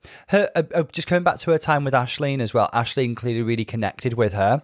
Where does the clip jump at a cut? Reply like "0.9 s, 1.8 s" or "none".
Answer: none